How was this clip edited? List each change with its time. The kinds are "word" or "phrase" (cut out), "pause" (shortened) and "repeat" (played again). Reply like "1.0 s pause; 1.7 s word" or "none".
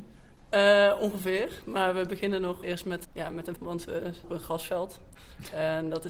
2.6 s word; 3.0 s word; 3.6 s word; 4.2 s word